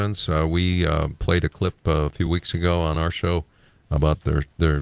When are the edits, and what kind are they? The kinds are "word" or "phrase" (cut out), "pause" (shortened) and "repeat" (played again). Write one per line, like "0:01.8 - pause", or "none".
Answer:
none